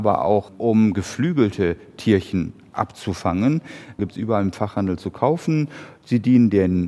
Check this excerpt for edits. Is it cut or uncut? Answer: uncut